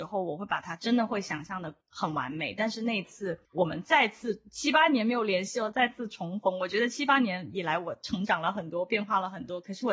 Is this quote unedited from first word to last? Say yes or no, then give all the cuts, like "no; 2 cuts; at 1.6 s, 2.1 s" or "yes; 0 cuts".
no; 2 cuts; at 1.8 s, 3.4 s